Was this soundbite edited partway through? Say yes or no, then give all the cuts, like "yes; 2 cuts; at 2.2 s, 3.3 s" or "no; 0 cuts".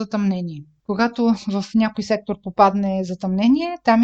no; 0 cuts